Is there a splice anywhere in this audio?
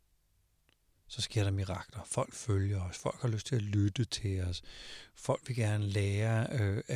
no; 0 cuts

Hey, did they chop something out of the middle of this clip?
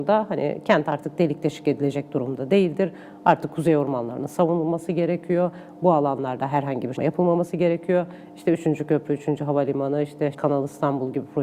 yes; 2 cuts; at 7.0 s, 10.3 s

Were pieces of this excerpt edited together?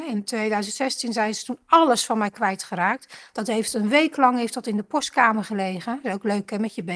no; 0 cuts

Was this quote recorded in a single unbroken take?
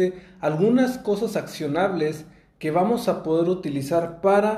yes; 0 cuts

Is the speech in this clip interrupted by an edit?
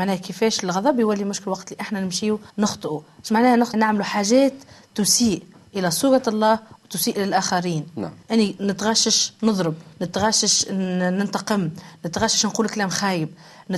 yes; 4 cuts; at 2.5 s, 3.7 s, 8.2 s, 9.9 s

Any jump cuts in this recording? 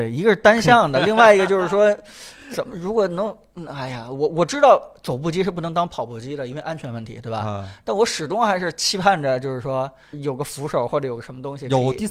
yes; 1 cut; at 10.1 s

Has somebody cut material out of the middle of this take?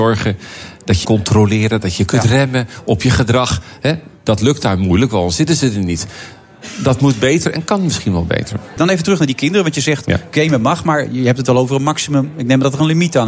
yes; 2 cuts; at 1.0 s, 8.8 s

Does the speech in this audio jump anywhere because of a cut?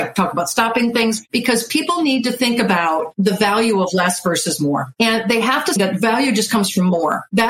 yes; 1 cut; at 5.8 s

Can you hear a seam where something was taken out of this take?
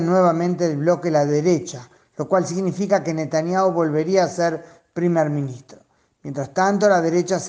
no; 0 cuts

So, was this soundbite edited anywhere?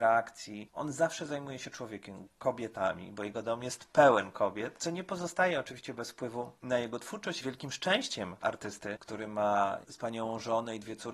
yes; 3 cuts; at 2.3 s, 7.4 s, 8.4 s

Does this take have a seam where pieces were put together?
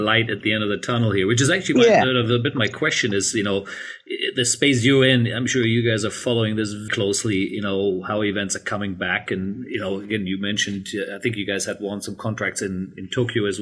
yes; 1 cut; at 6.9 s

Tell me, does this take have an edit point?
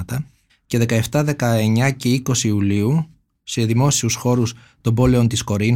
no; 0 cuts

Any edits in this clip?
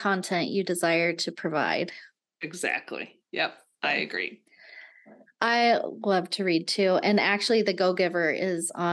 no; 0 cuts

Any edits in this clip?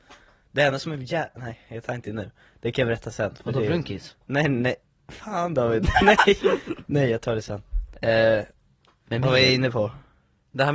no; 0 cuts

